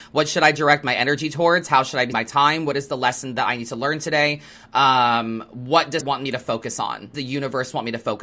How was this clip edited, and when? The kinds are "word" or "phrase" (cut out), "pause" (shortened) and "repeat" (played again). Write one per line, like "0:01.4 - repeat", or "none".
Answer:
0:02.1 - word
0:06.0 - word
0:07.1 - word